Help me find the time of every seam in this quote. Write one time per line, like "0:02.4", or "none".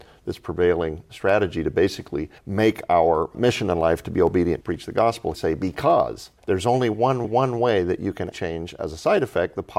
0:01.1
0:02.4
0:03.3
0:04.6
0:05.3
0:06.4
0:07.2
0:08.3